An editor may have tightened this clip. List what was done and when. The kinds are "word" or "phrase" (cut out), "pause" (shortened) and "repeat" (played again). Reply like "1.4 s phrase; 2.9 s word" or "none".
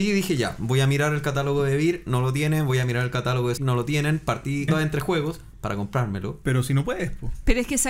3.6 s word; 4.7 s word